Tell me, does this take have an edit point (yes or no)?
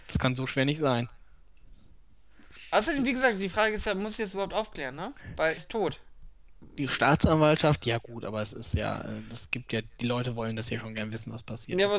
yes